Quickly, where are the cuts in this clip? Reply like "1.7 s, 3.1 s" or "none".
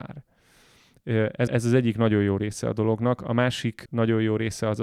1.5 s